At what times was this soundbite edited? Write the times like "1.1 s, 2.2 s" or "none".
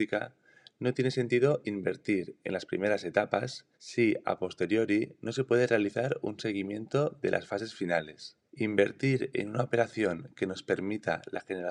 3.7 s, 8.5 s